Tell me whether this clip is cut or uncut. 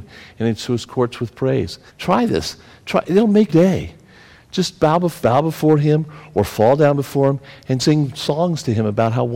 cut